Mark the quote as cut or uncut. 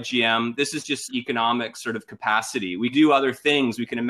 cut